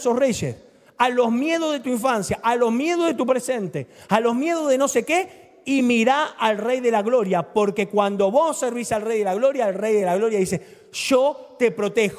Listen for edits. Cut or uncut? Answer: uncut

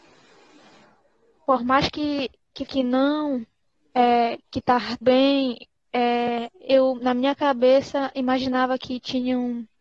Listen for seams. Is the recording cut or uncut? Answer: cut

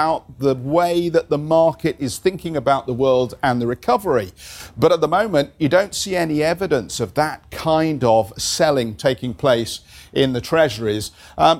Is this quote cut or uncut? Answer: uncut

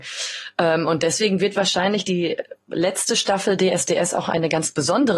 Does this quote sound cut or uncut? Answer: uncut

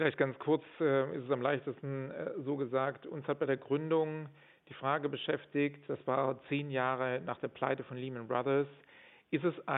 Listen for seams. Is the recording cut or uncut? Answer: uncut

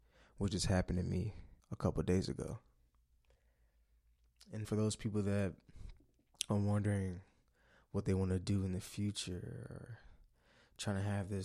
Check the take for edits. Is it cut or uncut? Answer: cut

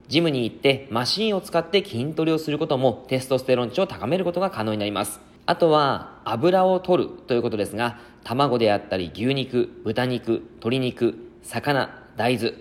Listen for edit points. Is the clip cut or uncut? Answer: uncut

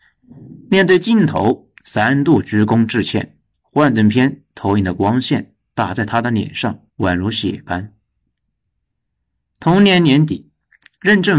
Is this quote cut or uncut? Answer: cut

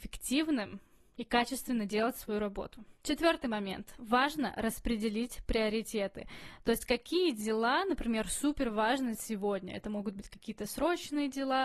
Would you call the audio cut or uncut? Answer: cut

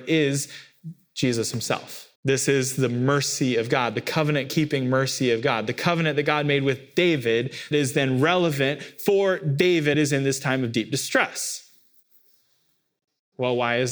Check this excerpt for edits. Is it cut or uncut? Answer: cut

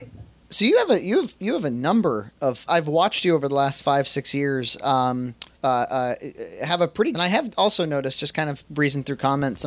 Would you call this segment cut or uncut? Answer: cut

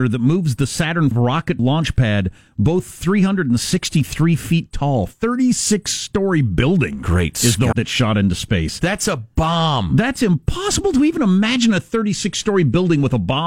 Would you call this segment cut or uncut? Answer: cut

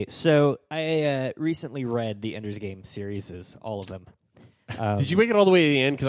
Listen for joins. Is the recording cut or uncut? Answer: uncut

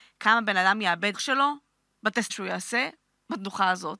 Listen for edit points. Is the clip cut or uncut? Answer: cut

